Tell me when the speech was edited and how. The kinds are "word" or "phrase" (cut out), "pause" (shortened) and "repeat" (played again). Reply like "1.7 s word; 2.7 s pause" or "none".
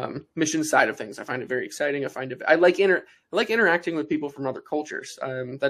none

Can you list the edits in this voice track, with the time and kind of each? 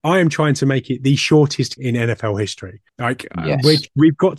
1.8 s word; 2.9 s pause

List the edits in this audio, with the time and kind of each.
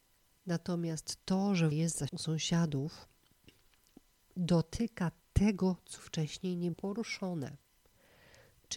1.7 s word; 2.1 s word; 5.2 s pause; 6.0 s word; 6.7 s word

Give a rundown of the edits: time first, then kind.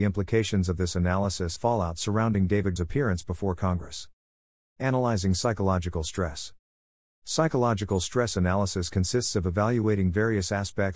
1.6 s phrase; 2.8 s word

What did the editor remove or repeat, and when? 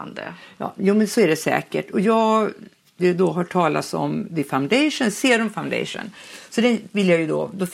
3.0 s word

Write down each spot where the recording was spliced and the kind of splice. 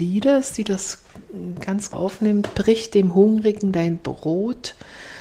1.9 s word

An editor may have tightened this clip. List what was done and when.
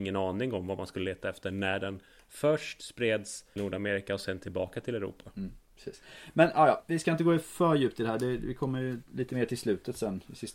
3.6 s word

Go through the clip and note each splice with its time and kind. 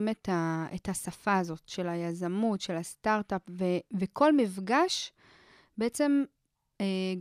none

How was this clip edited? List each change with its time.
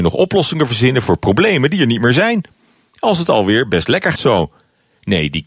4.1 s word

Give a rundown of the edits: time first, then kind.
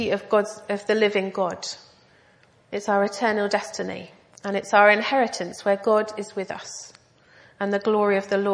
none

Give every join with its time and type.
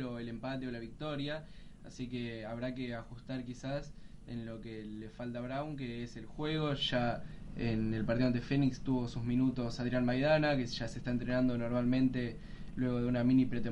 none

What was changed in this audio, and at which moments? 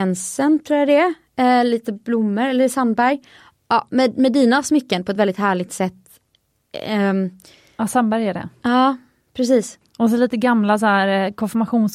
none

